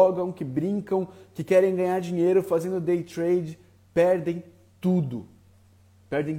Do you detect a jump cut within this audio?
no; 0 cuts

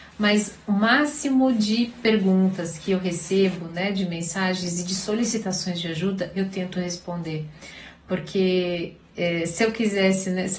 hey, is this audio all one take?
yes; 0 cuts

